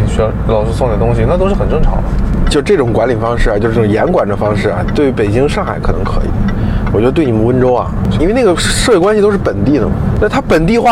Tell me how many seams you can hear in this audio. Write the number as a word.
one